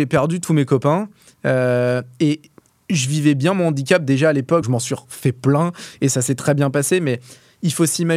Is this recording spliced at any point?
yes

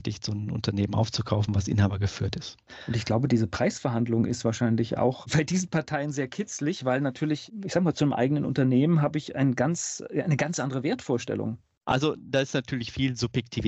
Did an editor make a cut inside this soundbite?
no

